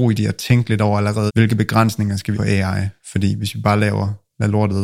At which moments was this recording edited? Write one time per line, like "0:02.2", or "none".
0:01.3
0:02.3